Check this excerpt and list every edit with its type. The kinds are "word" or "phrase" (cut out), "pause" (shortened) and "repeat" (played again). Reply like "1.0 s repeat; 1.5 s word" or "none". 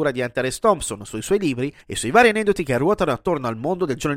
1.8 s pause

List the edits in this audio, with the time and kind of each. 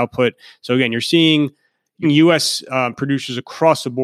2.0 s word

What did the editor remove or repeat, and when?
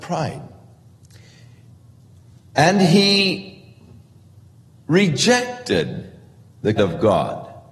6.8 s word

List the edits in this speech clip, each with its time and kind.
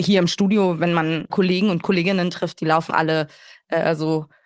1.3 s word; 2.9 s word

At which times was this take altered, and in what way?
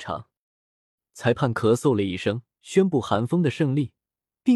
2.5 s pause

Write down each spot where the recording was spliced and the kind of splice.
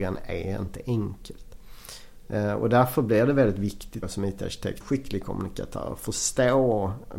4.0 s word; 4.8 s phrase

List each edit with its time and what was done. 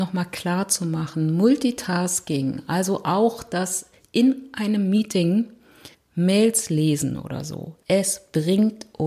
5.9 s pause; 7.8 s pause

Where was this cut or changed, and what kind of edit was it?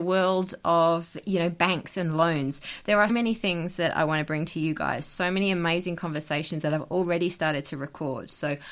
3.1 s word

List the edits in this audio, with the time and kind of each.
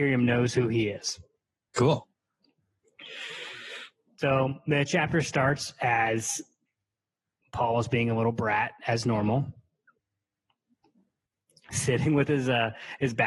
none

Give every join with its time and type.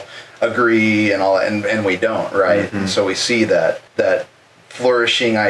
3.9 s pause

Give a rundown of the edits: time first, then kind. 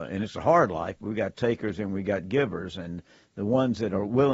none

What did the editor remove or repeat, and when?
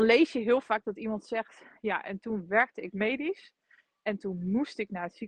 none

